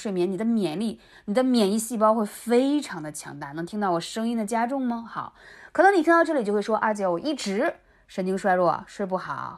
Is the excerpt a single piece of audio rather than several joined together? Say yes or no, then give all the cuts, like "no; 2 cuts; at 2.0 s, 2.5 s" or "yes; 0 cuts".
yes; 0 cuts